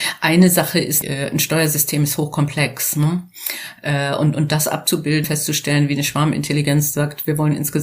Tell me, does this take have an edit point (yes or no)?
yes